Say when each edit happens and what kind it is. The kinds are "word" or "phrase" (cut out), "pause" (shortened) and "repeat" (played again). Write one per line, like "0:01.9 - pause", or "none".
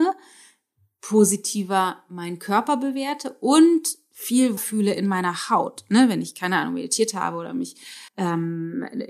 0:04.6 - word
0:08.1 - pause